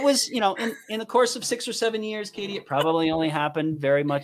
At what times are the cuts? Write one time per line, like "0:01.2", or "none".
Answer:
none

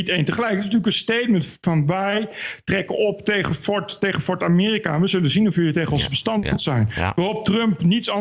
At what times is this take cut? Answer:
none

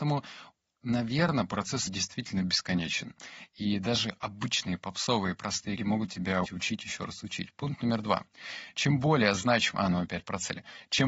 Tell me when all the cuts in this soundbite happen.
0:01.9
0:05.8
0:06.4

